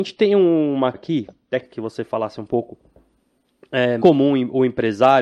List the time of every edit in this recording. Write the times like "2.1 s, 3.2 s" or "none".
0.9 s, 1.6 s, 4.0 s